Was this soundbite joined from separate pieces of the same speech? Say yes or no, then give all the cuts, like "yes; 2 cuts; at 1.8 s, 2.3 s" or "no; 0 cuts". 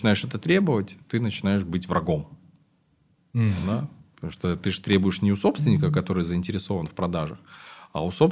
no; 0 cuts